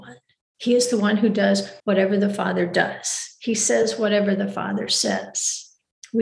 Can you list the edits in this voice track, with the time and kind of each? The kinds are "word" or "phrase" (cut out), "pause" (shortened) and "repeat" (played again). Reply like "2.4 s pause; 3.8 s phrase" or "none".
1.8 s pause